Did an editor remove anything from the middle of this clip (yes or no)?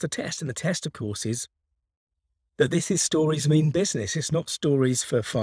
no